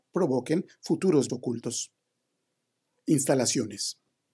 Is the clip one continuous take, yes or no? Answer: no